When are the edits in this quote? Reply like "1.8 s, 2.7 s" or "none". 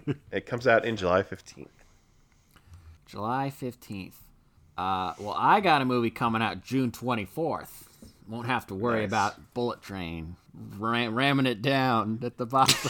1.0 s, 3.0 s, 4.6 s, 10.5 s

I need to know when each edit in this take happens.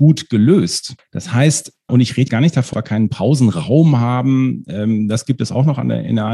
1.9 s, 2.3 s, 2.7 s

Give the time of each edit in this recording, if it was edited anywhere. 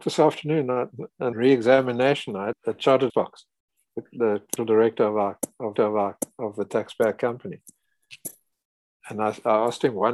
1.3 s, 2.5 s, 3.1 s, 4.6 s, 5.8 s

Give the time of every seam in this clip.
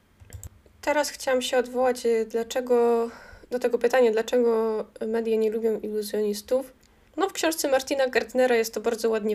none

